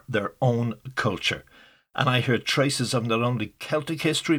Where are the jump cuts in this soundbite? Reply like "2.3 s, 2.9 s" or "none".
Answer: none